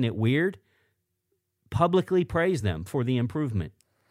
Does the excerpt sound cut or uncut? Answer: uncut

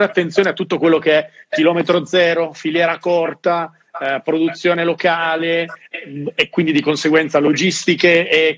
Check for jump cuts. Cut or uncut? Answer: uncut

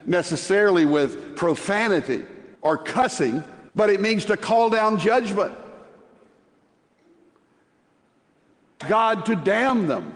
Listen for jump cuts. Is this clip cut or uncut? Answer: cut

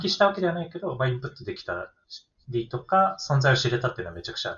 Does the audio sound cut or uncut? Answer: uncut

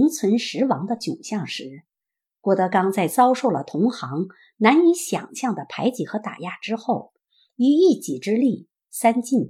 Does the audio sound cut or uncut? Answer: uncut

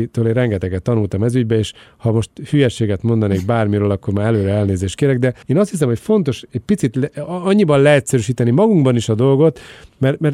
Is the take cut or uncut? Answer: cut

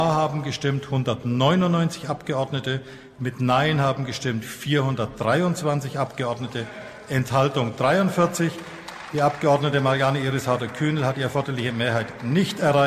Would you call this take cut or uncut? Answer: uncut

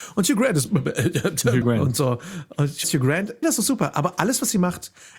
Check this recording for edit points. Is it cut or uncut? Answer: cut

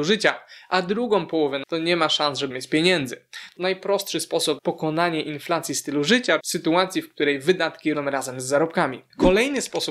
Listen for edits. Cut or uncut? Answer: cut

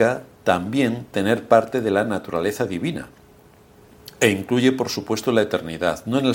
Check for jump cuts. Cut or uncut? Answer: uncut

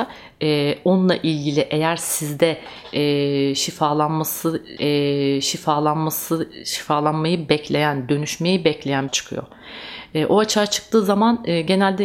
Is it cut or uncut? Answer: cut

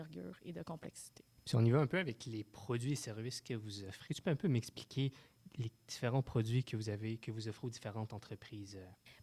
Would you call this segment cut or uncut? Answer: cut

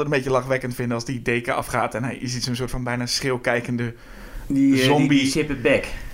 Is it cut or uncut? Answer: uncut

